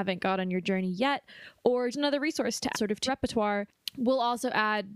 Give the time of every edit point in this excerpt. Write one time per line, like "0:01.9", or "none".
0:01.9
0:02.7
0:03.1